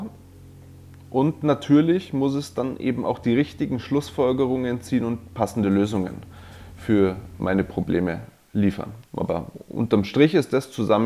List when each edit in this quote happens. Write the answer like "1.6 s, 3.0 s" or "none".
9.1 s

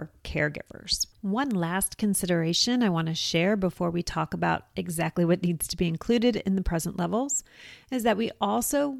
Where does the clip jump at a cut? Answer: 1.1 s

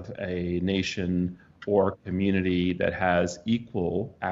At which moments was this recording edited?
none

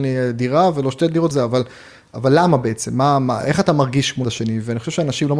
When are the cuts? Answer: 1.3 s, 4.2 s

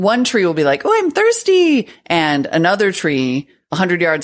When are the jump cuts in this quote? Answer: none

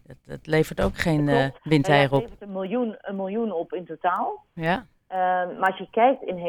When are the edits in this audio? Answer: 1.6 s

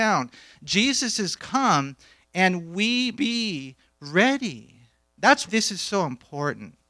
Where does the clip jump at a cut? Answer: 1.4 s, 3.1 s, 5.5 s

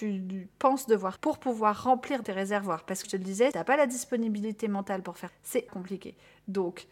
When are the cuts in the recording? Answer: 1.2 s, 2.2 s, 3.0 s, 3.5 s, 5.3 s, 5.7 s

